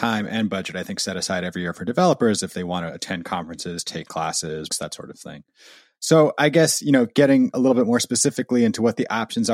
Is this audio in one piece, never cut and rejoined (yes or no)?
no